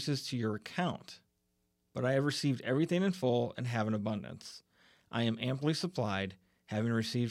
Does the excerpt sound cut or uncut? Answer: uncut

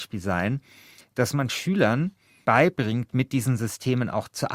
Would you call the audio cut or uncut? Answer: cut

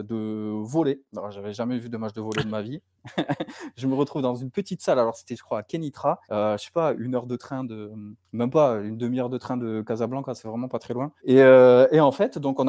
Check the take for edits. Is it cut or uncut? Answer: cut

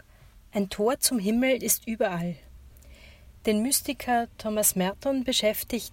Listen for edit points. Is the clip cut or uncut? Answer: uncut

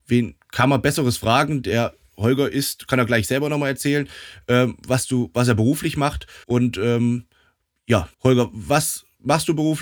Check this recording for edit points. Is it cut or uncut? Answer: cut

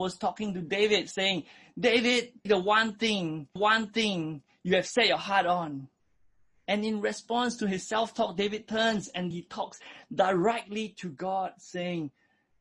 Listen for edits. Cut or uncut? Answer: cut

